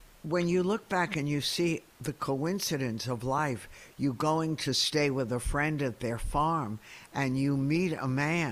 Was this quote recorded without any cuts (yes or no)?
no